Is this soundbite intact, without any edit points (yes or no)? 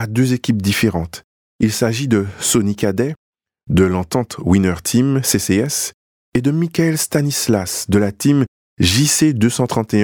yes